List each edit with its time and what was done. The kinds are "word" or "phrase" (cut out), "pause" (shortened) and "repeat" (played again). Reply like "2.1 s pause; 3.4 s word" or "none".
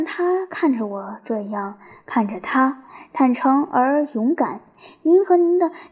none